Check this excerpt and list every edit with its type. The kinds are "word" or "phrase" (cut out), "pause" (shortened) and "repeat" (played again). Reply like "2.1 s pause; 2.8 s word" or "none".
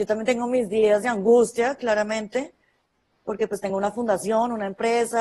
none